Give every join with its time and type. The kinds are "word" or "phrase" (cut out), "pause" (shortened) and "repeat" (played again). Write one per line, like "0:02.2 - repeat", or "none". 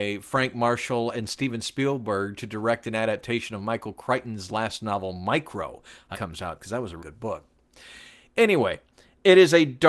0:06.1 - phrase
0:07.0 - word